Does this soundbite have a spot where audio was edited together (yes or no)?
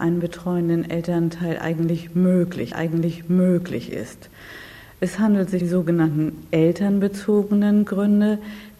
yes